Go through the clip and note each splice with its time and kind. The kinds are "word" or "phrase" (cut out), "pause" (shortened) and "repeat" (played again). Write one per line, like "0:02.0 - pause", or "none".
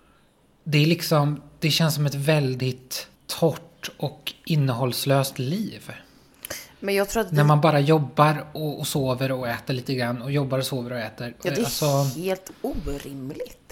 0:03.2 - pause